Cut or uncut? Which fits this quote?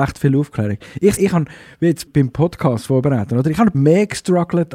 cut